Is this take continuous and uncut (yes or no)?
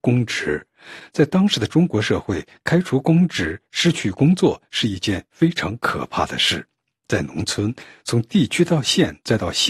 yes